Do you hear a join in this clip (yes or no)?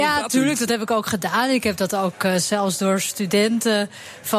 no